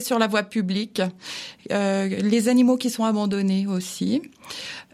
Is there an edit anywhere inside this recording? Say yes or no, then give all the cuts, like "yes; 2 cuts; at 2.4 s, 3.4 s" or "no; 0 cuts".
no; 0 cuts